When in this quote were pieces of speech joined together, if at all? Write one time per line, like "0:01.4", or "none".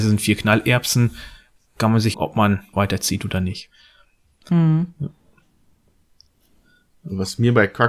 0:02.1
0:02.7